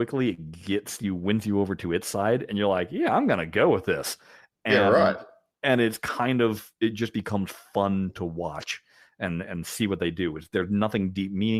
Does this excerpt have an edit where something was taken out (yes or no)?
no